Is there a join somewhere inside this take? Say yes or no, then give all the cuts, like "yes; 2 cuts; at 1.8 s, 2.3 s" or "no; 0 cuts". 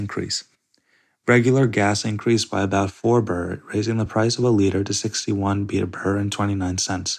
no; 0 cuts